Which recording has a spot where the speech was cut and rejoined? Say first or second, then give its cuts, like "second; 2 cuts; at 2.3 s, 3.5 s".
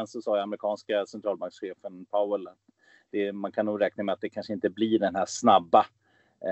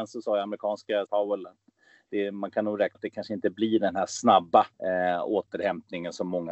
second; 3 cuts; at 1.1 s, 2.9 s, 4.7 s